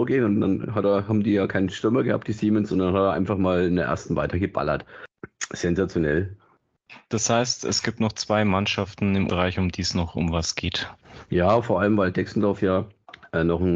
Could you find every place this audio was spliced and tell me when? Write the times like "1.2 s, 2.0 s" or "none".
9.3 s